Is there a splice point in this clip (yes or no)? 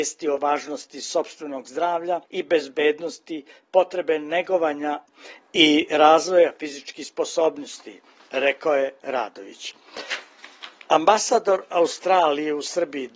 yes